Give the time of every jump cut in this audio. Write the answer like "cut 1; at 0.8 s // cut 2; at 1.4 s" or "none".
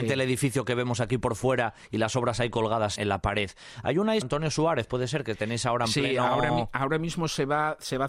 cut 1; at 3.0 s // cut 2; at 4.2 s